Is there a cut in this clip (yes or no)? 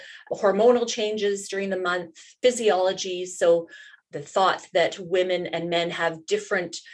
no